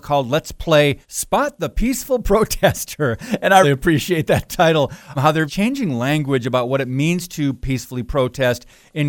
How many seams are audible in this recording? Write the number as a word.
four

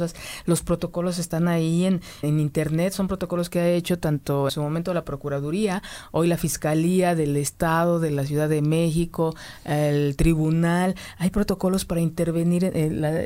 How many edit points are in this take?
two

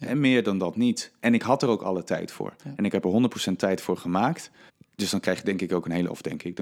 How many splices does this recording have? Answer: two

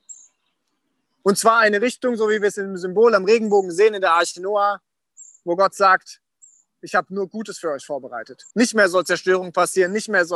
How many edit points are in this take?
one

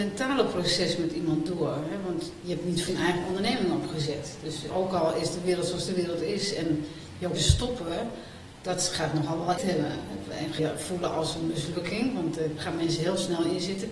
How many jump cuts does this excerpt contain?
six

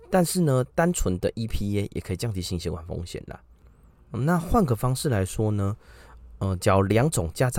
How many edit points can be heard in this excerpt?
zero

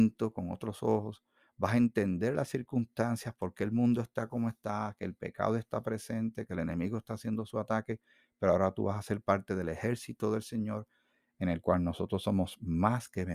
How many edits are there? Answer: zero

